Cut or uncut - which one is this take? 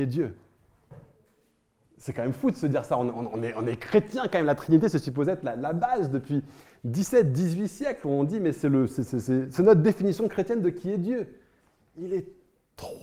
uncut